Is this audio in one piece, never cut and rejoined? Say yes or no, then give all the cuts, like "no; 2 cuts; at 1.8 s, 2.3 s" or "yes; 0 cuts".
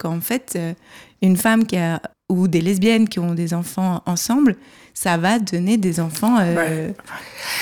no; 1 cut; at 2.1 s